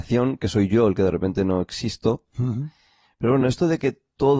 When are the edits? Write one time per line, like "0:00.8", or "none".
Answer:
none